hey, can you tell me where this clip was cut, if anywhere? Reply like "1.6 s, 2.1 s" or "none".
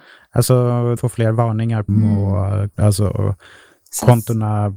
1.0 s, 1.9 s, 2.7 s